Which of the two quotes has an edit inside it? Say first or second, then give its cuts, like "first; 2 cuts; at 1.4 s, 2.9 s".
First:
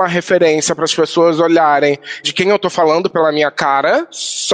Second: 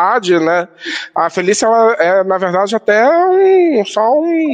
first; 1 cut; at 2.2 s